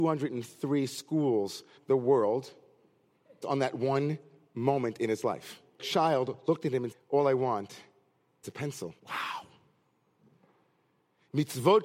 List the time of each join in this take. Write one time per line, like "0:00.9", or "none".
0:01.8
0:03.4
0:05.8
0:06.9
0:08.4
0:09.0